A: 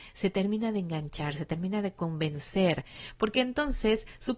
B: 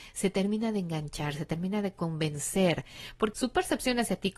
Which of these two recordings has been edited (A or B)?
B